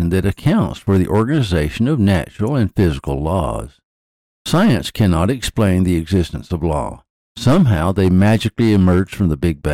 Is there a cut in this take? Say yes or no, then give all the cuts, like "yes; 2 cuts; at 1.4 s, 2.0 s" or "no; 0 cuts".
no; 0 cuts